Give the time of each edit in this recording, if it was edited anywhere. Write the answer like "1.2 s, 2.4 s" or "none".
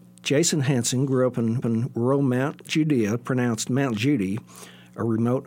1.6 s